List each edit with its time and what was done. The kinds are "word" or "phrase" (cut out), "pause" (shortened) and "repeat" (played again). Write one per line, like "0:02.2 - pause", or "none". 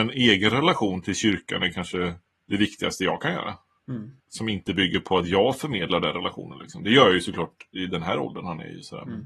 0:02.3 - pause
0:04.2 - pause